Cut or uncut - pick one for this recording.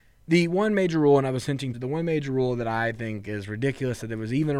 cut